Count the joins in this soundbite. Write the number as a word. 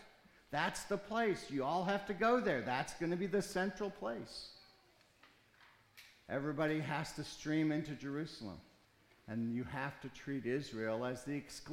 one